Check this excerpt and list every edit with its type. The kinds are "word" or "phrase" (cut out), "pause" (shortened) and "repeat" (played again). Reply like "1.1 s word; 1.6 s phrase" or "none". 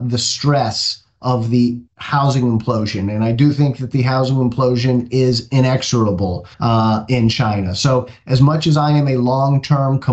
1.9 s pause; 6.5 s pause

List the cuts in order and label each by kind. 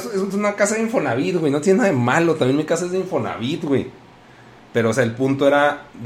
none

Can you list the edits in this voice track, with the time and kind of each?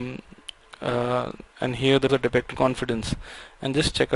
1.5 s pause; 2.1 s word; 2.5 s word

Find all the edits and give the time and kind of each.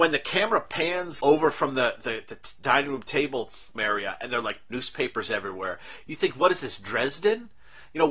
1.2 s word; 3.8 s phrase; 4.7 s phrase

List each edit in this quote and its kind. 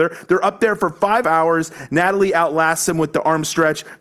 1.2 s phrase

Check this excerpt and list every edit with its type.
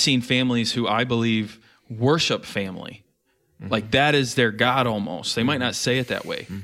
none

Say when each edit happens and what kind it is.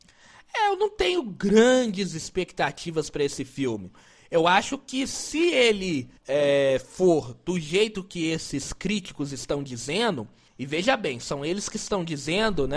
6.2 s pause; 10.5 s pause

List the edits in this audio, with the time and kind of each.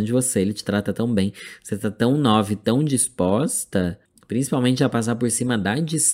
4.1 s pause

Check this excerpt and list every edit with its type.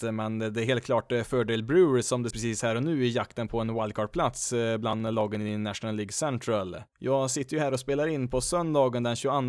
2.3 s phrase

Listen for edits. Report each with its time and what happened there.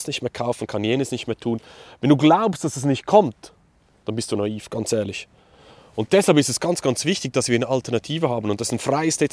none

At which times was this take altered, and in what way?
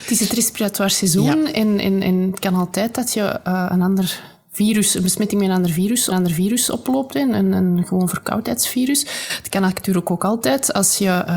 6.1 s repeat

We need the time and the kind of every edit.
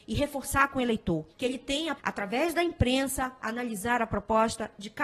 1.3 s pause; 2.0 s phrase

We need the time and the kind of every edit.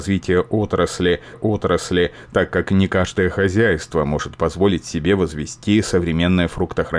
1.3 s repeat

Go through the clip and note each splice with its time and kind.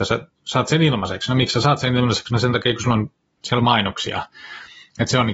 none

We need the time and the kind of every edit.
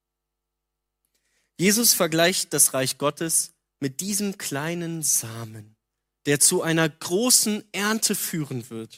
none

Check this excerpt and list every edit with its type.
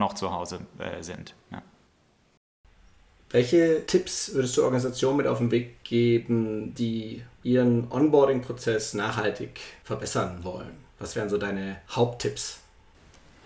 none

